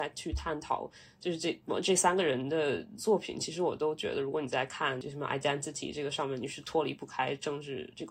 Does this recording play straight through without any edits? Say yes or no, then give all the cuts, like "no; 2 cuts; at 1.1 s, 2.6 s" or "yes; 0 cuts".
yes; 0 cuts